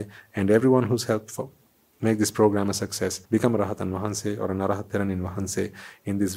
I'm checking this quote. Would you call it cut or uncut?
cut